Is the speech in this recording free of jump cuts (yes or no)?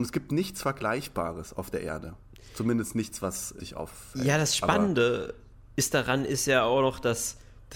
no